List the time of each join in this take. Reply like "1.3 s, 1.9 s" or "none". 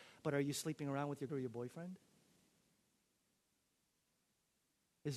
1.3 s